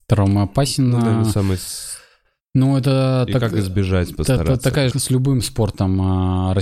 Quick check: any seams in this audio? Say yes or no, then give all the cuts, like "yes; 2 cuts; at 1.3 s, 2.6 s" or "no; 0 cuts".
yes; 1 cut; at 4.9 s